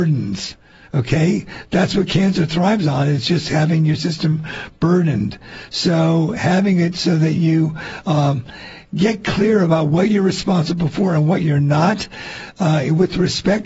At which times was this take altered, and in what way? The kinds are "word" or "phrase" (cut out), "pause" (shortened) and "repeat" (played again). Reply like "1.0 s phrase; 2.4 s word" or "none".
none